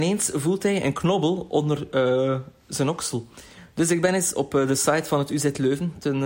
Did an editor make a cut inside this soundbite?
no; 0 cuts

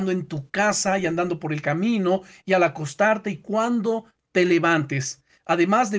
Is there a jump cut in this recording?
no; 0 cuts

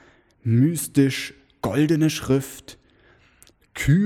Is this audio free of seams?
yes; 0 cuts

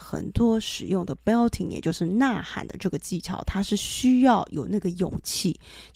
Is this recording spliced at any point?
no; 0 cuts

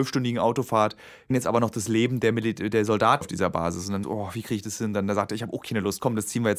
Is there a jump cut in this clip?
yes; 3 cuts; at 1.3 s, 3.2 s, 4.0 s

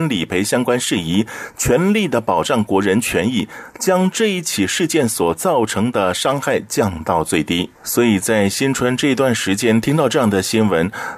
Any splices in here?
yes; 1 cut; at 7.8 s

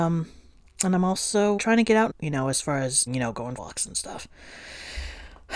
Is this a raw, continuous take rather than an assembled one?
no; 4 cuts; at 1.6 s, 2.1 s, 3.1 s, 3.6 s

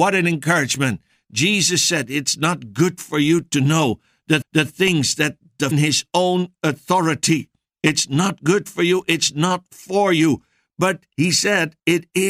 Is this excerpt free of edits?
no; 2 cuts; at 4.4 s, 5.7 s

